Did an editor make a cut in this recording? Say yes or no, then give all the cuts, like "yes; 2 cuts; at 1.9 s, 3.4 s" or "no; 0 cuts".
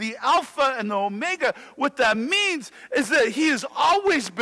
no; 0 cuts